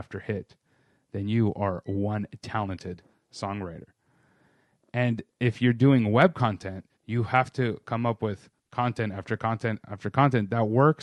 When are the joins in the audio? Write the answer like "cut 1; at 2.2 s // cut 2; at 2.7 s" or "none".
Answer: cut 1; at 7.0 s // cut 2; at 8.6 s